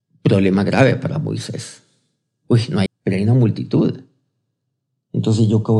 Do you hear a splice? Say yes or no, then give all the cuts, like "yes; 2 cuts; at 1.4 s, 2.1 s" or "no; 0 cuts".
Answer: yes; 1 cut; at 2.9 s